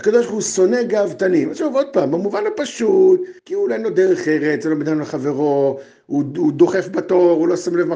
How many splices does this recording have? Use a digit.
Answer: 1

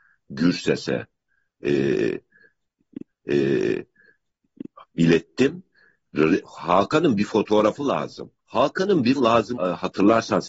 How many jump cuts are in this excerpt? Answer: 4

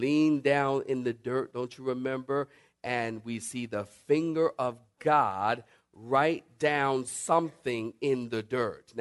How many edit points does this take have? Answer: 0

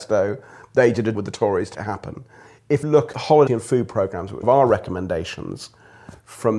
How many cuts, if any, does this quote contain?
6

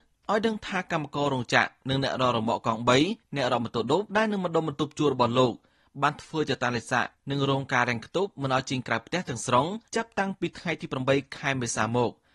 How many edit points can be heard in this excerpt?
2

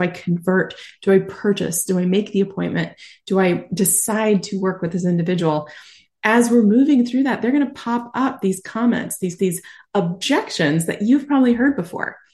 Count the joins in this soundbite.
1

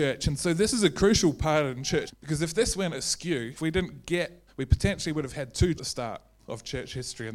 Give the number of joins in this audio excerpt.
4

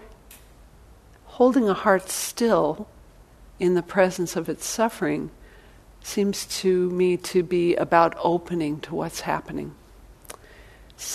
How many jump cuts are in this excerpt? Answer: 0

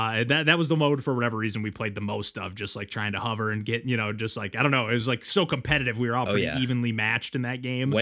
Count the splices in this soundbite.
0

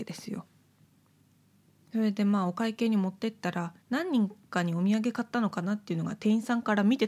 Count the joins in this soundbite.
1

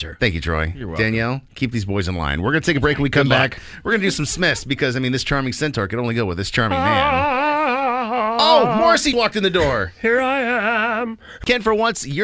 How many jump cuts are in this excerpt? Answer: 1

